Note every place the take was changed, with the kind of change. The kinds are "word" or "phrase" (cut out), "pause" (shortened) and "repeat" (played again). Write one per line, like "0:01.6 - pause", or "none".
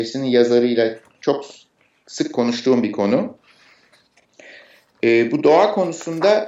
none